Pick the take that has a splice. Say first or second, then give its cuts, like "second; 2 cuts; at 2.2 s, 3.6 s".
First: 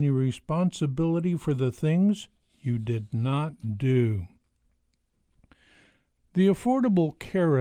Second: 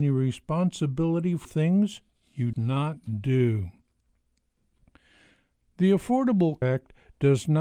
second; 3 cuts; at 1.4 s, 2.5 s, 6.6 s